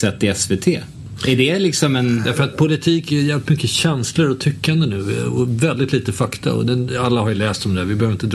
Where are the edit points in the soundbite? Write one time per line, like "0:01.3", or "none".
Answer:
none